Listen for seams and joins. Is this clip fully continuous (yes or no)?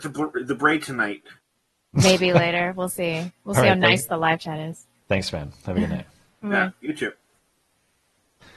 yes